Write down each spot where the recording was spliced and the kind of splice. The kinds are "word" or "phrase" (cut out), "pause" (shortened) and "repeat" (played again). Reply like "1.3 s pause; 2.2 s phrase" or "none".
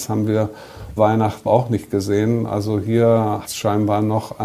1.0 s word; 1.5 s word; 3.4 s word

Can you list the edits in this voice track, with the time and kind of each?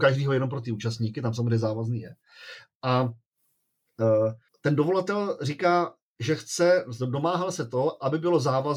4.5 s pause

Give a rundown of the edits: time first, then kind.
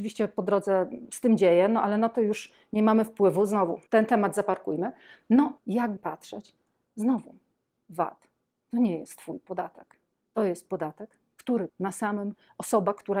3.9 s pause; 5.6 s word; 6.0 s word; 11.7 s word

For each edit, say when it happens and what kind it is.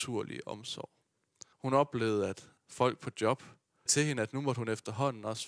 1.5 s pause; 2.6 s pause; 3.9 s word

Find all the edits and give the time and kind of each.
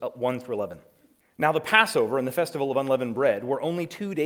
1.2 s pause

